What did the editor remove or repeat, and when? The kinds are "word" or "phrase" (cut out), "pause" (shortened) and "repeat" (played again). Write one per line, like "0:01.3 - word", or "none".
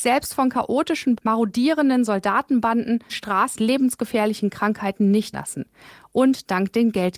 0:01.2 - word
0:03.1 - word
0:03.6 - word
0:05.3 - word